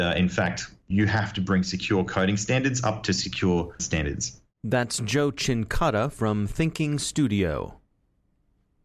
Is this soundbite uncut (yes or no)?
no